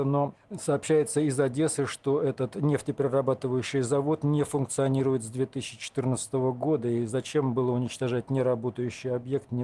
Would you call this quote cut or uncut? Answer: uncut